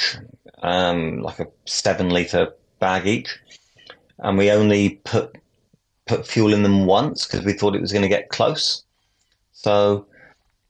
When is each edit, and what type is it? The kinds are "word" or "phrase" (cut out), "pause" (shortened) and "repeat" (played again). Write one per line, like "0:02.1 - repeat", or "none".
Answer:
none